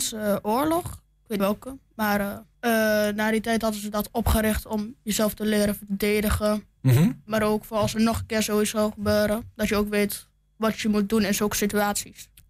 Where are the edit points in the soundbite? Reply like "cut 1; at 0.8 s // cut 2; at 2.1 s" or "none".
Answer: cut 1; at 1.4 s // cut 2; at 2.5 s